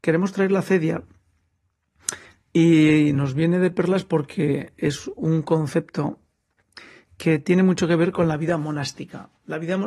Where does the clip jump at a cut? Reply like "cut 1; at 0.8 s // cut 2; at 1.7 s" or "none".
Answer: none